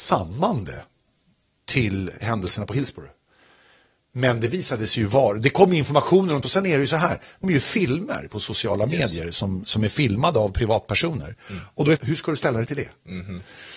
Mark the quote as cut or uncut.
cut